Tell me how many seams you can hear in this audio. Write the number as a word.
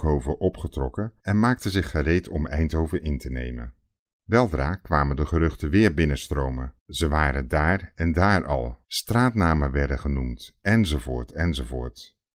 four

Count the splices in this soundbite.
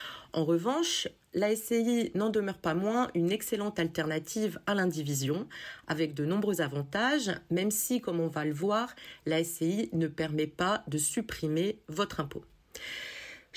zero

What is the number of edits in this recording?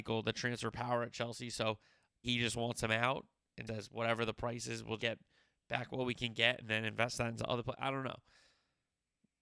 three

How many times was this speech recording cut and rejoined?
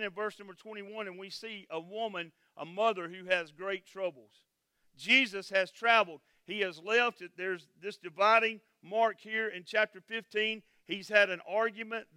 zero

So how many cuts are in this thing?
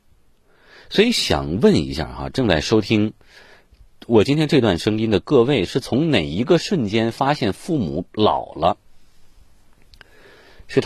one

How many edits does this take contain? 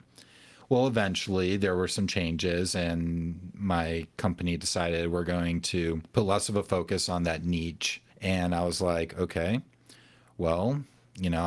two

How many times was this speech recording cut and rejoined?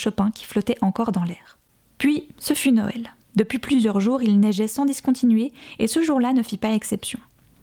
one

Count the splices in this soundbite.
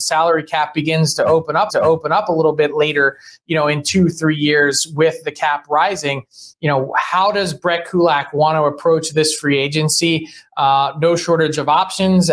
two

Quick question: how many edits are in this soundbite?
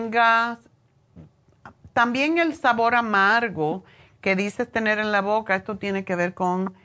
zero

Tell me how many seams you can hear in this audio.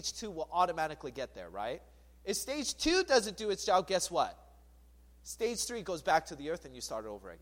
zero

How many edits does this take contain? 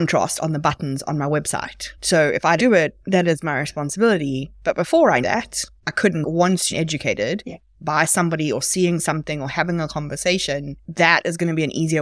four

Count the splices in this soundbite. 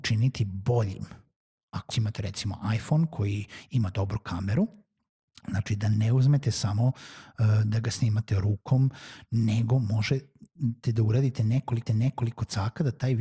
two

